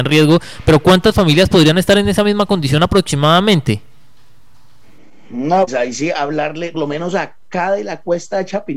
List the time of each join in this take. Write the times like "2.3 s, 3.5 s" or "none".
5.7 s, 6.7 s